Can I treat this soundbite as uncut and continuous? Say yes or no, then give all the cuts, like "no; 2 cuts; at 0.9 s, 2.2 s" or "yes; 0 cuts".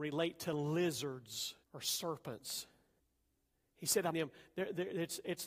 no; 3 cuts; at 1.6 s, 3.0 s, 4.1 s